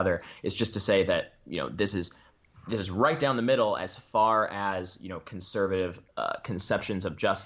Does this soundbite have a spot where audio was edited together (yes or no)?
no